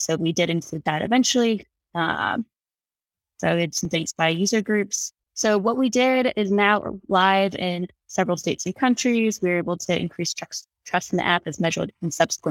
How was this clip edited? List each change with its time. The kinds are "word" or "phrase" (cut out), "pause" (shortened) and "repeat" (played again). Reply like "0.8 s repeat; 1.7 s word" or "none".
none

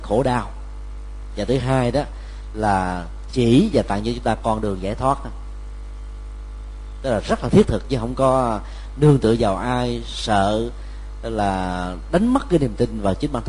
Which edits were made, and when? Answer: none

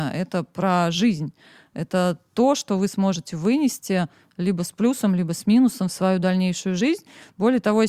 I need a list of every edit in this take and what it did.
none

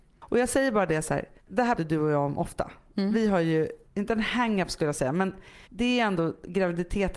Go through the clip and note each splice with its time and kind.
1.4 s pause; 1.8 s word; 3.8 s pause; 5.6 s pause

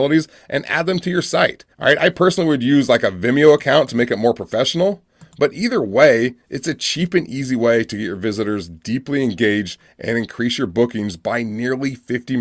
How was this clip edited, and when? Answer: 1.7 s pause; 6.4 s pause

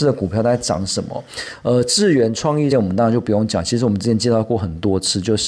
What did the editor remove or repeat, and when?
2.7 s phrase

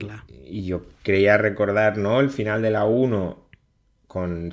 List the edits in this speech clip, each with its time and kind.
none

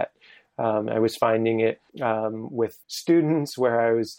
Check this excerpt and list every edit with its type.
1.9 s pause; 2.8 s pause

